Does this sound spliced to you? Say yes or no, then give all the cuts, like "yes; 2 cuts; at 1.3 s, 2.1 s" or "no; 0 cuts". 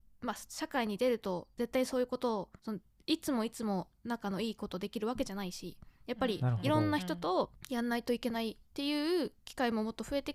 no; 0 cuts